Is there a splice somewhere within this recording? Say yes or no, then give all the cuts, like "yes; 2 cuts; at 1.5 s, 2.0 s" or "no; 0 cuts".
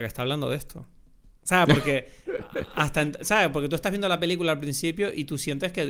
no; 0 cuts